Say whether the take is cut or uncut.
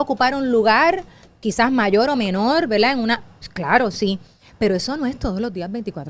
uncut